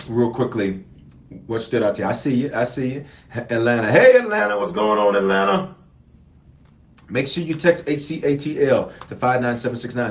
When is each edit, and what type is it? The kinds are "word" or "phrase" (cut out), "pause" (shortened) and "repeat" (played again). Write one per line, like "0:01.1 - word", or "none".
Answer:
none

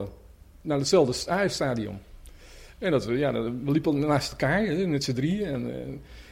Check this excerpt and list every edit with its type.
none

